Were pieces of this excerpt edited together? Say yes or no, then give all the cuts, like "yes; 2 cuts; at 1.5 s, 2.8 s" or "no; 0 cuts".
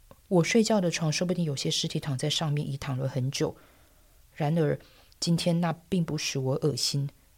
no; 0 cuts